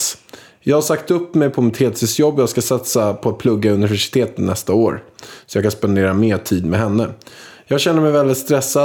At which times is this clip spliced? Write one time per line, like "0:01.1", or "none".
none

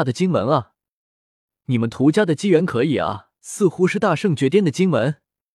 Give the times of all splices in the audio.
0:03.4

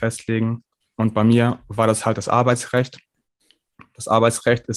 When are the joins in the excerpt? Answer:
none

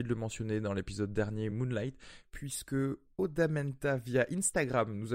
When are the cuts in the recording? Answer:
none

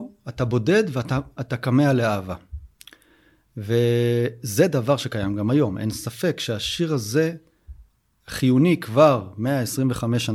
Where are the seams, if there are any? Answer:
none

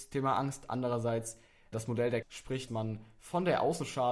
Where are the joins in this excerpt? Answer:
0:01.7
0:02.2
0:02.7

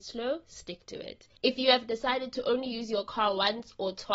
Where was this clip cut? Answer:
0:01.4

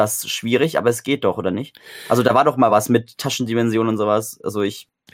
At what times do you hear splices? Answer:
none

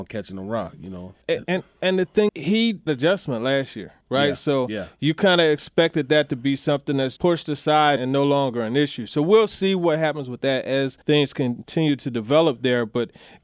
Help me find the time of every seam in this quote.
0:01.2
0:02.3
0:02.9
0:04.0
0:07.2
0:08.0
0:11.0

